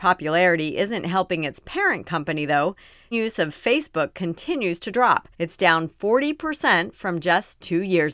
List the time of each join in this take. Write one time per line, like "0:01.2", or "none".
0:03.1
0:05.3